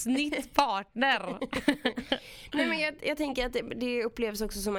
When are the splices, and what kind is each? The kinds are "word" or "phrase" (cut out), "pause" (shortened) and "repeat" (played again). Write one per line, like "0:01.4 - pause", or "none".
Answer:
none